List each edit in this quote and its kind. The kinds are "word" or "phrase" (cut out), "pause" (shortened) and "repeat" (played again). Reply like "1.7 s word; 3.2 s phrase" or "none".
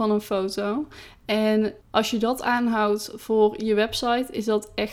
1.8 s pause